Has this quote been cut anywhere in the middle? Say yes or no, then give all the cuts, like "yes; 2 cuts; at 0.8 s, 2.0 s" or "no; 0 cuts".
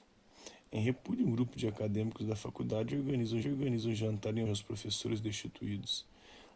yes; 2 cuts; at 3.4 s, 4.5 s